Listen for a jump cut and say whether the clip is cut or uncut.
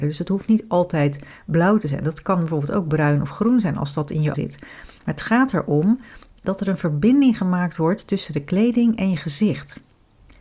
cut